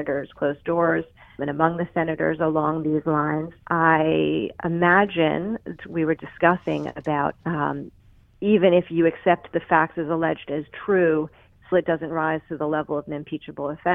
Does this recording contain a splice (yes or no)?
yes